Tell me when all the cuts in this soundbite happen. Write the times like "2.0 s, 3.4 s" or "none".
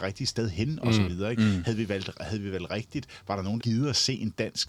3.6 s